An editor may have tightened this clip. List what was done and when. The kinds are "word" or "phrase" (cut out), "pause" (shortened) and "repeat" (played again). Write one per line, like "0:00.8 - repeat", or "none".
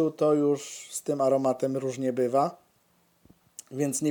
none